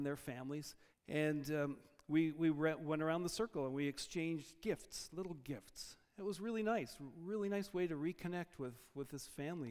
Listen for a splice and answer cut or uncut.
cut